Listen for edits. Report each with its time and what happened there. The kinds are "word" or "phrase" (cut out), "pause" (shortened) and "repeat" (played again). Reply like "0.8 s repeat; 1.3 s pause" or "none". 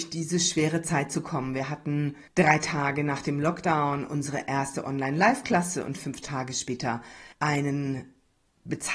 2.3 s pause; 7.3 s pause